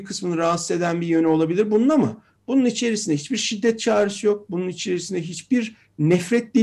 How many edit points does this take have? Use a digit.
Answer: 0